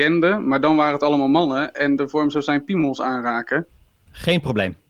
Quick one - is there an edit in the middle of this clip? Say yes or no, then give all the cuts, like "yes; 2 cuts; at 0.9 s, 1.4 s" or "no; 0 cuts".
yes; 1 cut; at 2.0 s